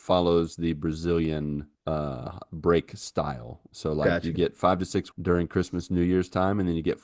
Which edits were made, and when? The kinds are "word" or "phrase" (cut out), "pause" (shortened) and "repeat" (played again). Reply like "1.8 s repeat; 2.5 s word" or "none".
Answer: 1.8 s pause; 5.1 s word